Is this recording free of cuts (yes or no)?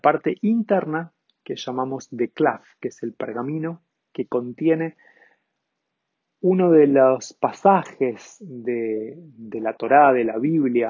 yes